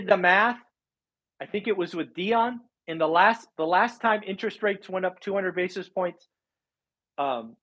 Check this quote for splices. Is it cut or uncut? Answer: uncut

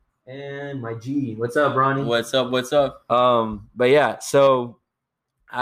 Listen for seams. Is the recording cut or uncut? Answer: uncut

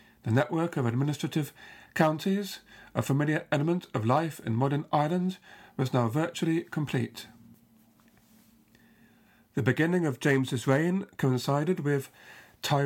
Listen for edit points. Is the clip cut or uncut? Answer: uncut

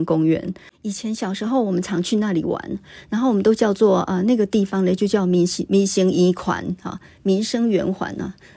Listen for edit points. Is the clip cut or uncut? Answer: uncut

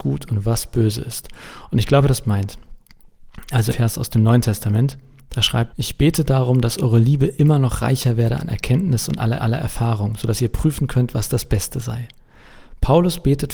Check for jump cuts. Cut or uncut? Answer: cut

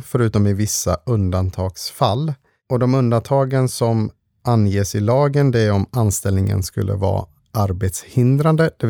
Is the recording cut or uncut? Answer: uncut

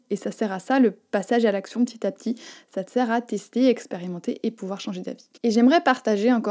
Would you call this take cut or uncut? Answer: cut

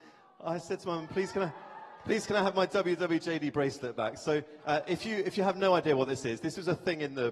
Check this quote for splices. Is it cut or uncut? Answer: uncut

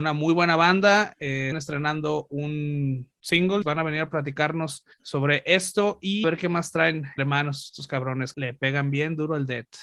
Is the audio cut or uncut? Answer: cut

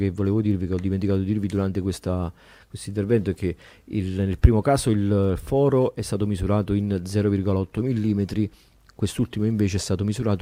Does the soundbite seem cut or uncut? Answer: uncut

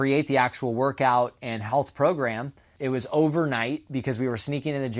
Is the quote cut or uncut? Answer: uncut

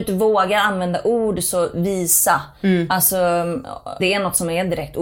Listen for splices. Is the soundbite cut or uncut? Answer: cut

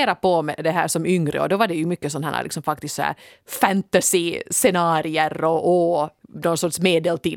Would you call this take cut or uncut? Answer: uncut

